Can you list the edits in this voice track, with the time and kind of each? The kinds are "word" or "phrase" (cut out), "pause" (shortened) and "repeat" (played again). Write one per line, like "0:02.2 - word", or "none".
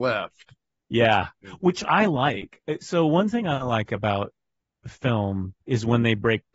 0:01.4 - word
0:05.6 - pause